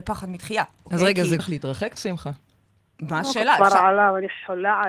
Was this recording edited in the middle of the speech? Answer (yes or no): yes